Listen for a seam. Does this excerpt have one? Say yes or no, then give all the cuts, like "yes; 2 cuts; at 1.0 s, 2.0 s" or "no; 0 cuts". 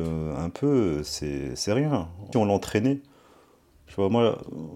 yes; 1 cut; at 2.3 s